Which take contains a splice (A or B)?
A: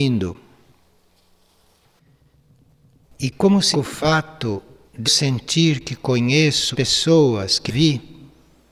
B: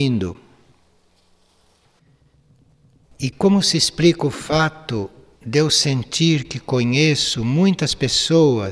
A